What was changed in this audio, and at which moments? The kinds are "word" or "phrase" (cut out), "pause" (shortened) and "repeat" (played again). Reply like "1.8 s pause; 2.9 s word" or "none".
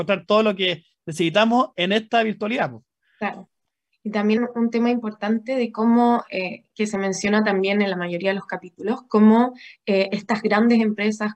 4.4 s word